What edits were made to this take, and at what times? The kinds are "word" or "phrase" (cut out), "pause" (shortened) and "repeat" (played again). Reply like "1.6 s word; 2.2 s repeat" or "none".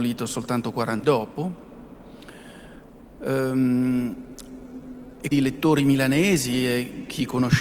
1.0 s word; 5.3 s word